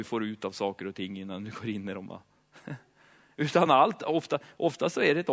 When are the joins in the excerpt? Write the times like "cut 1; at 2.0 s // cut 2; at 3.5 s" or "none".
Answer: none